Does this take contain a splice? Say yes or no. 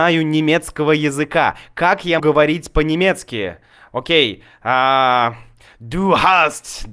yes